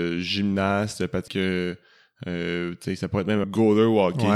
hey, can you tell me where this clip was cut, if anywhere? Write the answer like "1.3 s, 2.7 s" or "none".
1.3 s, 3.4 s

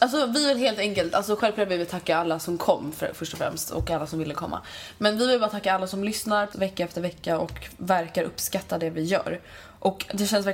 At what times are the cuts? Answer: 6.5 s

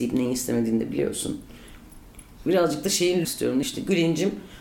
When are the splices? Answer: 3.2 s, 3.6 s

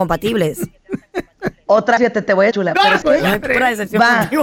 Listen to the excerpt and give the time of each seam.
2.0 s, 2.5 s, 3.0 s

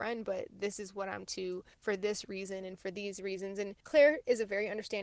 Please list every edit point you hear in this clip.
1.3 s, 1.7 s, 3.8 s

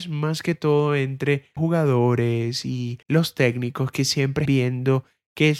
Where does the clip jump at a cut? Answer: 1.6 s, 3.0 s, 4.5 s

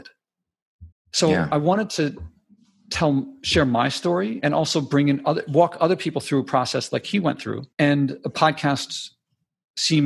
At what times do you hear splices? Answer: 0.9 s, 7.7 s

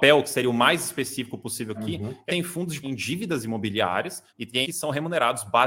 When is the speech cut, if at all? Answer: 1.7 s, 2.3 s, 2.8 s, 4.3 s, 4.6 s

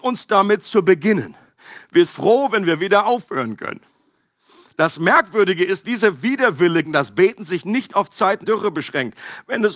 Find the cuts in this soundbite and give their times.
2.1 s, 5.8 s, 6.8 s, 8.4 s

